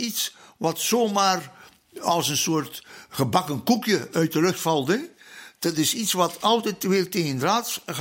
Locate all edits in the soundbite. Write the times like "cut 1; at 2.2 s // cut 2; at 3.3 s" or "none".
cut 1; at 6.4 s